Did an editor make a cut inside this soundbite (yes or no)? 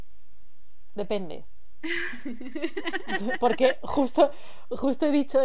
no